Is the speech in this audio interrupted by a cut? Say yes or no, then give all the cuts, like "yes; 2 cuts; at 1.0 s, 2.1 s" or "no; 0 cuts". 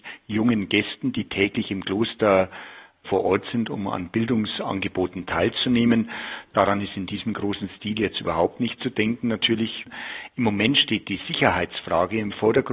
no; 0 cuts